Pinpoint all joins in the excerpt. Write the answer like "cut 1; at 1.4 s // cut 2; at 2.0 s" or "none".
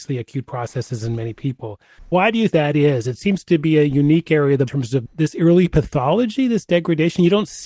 cut 1; at 2.5 s // cut 2; at 4.7 s